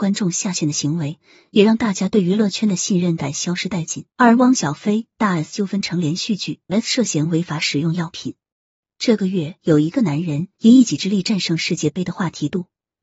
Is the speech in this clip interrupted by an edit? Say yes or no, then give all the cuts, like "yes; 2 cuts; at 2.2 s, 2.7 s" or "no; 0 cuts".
yes; 3 cuts; at 4.1 s, 6.7 s, 10.6 s